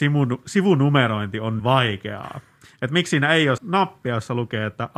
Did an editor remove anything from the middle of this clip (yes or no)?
yes